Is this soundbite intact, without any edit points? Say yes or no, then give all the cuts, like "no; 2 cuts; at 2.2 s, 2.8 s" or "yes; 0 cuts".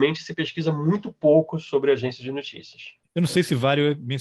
yes; 0 cuts